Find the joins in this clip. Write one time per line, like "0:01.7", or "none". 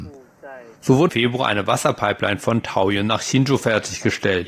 0:01.1